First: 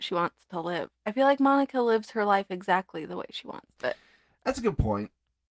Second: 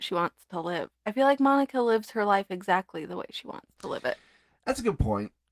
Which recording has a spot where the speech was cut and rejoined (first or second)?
first